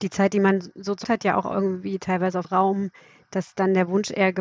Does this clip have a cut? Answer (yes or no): yes